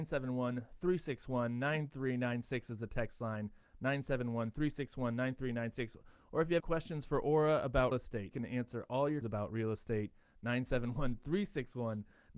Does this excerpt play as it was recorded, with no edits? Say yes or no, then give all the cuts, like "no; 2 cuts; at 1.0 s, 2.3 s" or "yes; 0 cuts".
no; 4 cuts; at 6.6 s, 7.9 s, 8.3 s, 9.2 s